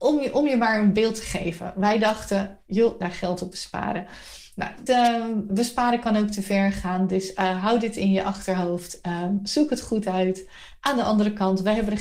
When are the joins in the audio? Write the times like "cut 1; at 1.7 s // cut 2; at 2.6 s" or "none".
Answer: cut 1; at 3.0 s // cut 2; at 4.9 s // cut 3; at 5.5 s